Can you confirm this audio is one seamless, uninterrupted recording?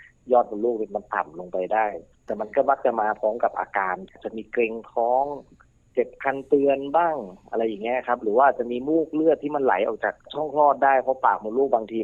yes; 0 cuts

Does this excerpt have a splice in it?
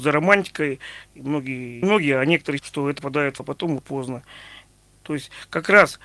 yes; 5 cuts; at 1.8 s, 2.6 s, 3.0 s, 3.4 s, 3.8 s

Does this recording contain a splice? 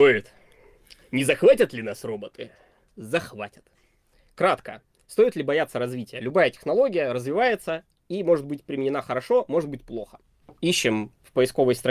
no; 0 cuts

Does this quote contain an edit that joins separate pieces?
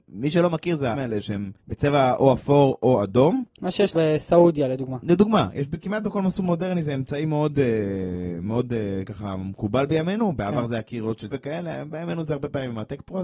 yes; 4 cuts; at 0.9 s, 1.6 s, 3.9 s, 11.3 s

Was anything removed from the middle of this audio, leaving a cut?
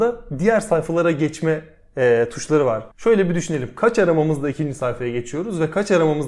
yes; 1 cut; at 2.9 s

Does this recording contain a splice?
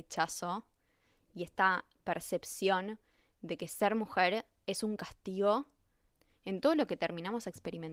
no; 0 cuts

